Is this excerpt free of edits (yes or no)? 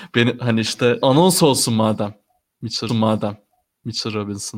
no